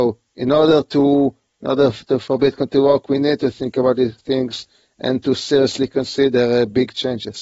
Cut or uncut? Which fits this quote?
uncut